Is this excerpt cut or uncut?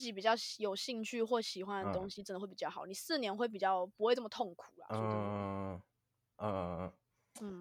uncut